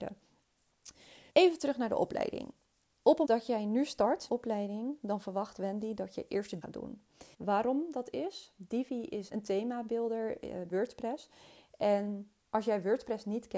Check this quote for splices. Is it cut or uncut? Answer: cut